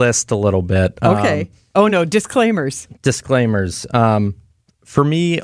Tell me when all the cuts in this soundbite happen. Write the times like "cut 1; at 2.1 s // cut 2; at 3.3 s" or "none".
none